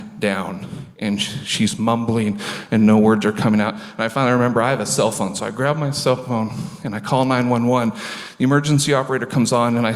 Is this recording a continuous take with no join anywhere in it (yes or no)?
no